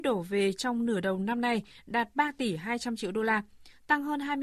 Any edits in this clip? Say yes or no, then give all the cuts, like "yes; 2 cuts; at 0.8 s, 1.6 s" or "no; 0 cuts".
no; 0 cuts